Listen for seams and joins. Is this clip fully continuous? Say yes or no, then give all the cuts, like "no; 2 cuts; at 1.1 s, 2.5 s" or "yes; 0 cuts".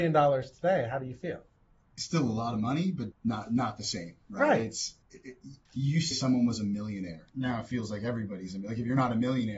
no; 6 cuts; at 1.6 s, 3.1 s, 5.0 s, 5.7 s, 6.1 s, 7.3 s